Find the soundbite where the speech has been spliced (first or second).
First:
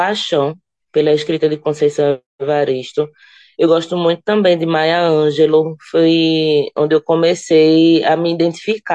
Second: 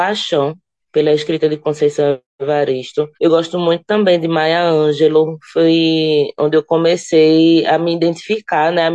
second